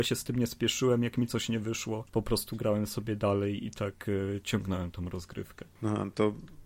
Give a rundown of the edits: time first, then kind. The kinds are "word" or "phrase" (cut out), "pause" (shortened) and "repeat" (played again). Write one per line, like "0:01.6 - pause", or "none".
0:02.1 - pause

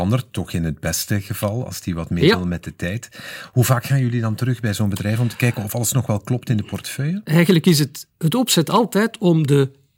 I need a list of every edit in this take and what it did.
0:08.1 - pause

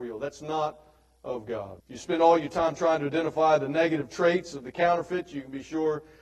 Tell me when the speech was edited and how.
0:01.8 - pause

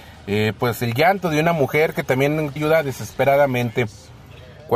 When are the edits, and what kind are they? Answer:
0:02.6 - word

